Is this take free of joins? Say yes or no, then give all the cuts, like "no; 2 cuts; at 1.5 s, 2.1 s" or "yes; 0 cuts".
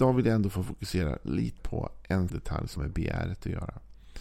no; 3 cuts; at 1.6 s, 2.3 s, 2.8 s